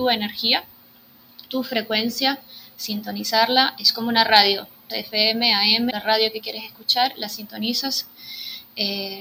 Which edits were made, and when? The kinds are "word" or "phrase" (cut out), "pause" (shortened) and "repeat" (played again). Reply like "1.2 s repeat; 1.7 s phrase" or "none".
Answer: 1.5 s pause; 4.9 s word; 5.9 s phrase